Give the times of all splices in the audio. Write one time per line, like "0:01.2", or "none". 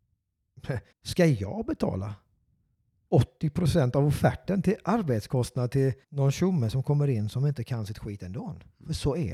0:00.9
0:06.0